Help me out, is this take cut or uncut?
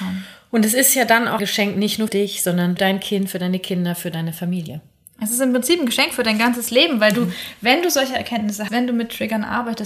cut